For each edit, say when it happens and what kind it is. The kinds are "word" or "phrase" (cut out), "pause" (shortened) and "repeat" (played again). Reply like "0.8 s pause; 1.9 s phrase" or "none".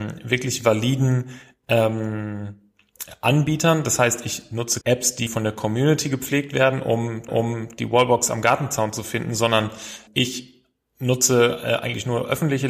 4.8 s word; 5.3 s word; 7.3 s repeat; 10.1 s word